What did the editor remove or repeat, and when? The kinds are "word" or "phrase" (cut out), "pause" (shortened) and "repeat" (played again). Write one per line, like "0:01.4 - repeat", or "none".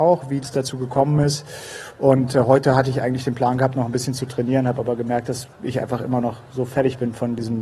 0:05.5 - pause